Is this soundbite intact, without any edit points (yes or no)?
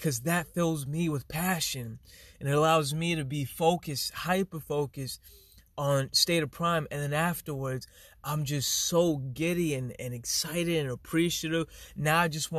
yes